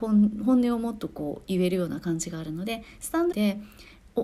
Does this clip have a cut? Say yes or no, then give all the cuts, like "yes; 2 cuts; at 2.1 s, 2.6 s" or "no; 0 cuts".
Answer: yes; 1 cut; at 3.3 s